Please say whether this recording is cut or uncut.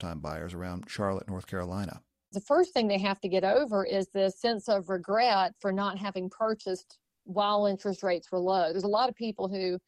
uncut